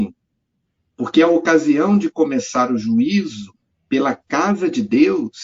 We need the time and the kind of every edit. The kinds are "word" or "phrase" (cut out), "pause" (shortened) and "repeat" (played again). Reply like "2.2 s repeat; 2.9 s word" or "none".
3.7 s pause